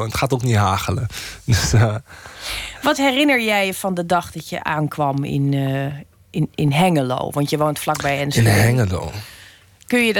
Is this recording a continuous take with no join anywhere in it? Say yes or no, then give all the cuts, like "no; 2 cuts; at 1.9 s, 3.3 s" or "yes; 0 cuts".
yes; 0 cuts